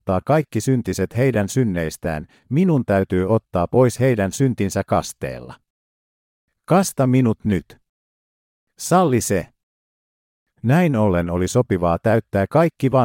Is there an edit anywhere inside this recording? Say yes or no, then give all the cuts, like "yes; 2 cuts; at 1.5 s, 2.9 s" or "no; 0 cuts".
no; 0 cuts